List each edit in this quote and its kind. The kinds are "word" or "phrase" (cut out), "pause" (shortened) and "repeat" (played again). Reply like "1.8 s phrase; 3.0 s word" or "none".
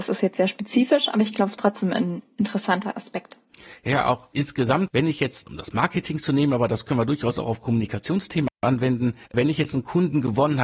9.2 s pause